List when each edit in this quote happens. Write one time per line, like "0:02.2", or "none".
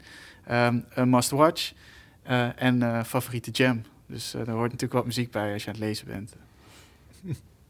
none